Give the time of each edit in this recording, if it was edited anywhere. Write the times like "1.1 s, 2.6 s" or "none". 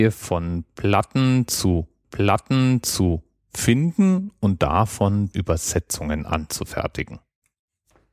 2.0 s, 5.3 s